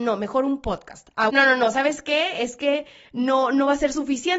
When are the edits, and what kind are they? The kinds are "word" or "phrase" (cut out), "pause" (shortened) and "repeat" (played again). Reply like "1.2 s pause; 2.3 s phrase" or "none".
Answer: 1.3 s word

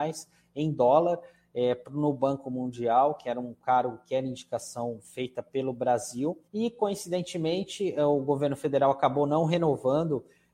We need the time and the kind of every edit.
6.5 s pause

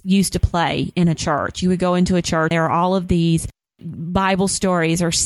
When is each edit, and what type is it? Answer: 2.5 s word

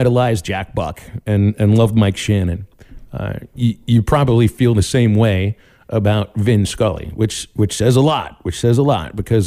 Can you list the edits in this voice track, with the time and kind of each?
none

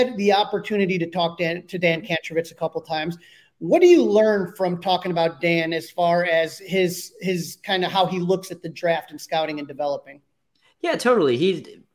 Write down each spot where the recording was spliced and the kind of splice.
none

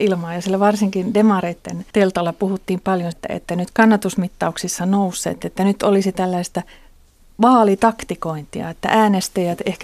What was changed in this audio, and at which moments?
1.9 s pause; 3.1 s word; 3.7 s phrase

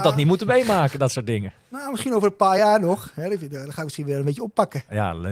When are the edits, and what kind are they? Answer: none

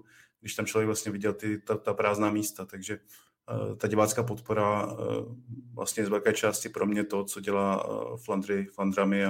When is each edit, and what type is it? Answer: none

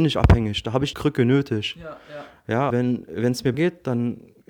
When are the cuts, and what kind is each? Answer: 0.9 s word; 2.7 s word; 3.5 s word

